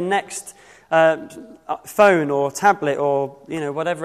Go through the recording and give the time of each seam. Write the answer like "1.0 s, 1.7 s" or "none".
none